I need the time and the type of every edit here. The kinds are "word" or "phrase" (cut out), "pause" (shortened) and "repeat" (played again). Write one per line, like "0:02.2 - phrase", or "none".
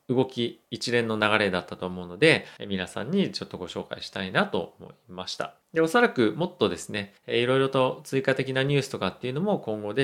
0:02.6 - pause
0:05.6 - pause
0:07.2 - pause